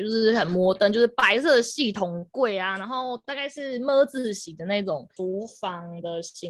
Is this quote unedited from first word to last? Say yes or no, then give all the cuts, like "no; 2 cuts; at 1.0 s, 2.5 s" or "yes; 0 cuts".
yes; 0 cuts